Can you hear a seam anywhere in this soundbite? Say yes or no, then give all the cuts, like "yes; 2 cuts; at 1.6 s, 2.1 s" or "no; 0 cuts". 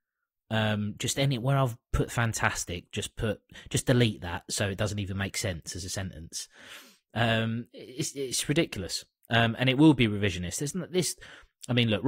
no; 0 cuts